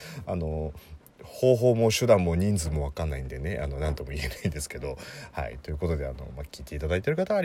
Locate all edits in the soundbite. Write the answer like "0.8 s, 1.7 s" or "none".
none